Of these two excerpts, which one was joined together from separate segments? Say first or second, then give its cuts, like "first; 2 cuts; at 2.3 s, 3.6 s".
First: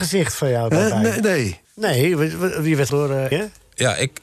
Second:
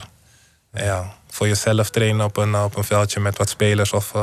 first; 3 cuts; at 1.6 s, 2.9 s, 3.3 s